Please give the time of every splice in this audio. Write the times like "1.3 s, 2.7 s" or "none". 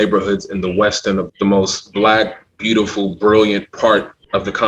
1.3 s